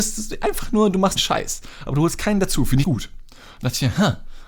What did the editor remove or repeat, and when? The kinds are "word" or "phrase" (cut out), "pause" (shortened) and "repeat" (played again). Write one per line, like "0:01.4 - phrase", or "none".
0:01.2 - word
0:02.8 - word